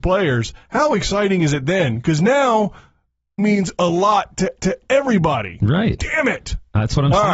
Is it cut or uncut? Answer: cut